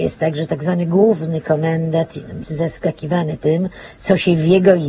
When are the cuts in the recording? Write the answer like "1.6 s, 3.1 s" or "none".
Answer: 2.4 s